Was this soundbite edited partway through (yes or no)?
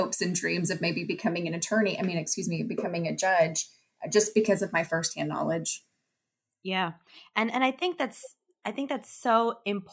no